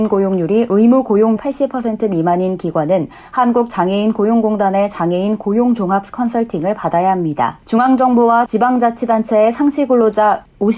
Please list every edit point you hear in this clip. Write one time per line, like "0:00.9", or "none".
0:01.4
0:07.6